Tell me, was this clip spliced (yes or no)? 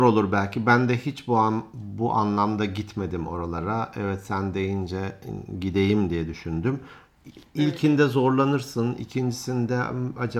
no